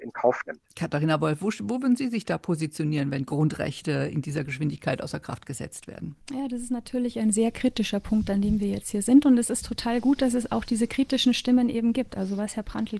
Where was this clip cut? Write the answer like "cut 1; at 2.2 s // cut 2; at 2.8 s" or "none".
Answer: cut 1; at 6.2 s